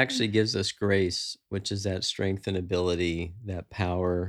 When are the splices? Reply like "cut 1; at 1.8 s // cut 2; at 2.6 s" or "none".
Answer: none